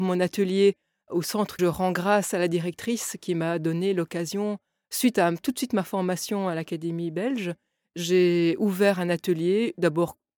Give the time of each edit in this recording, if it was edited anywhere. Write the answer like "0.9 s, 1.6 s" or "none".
1.6 s